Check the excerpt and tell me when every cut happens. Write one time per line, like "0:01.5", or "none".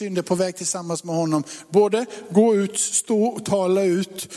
none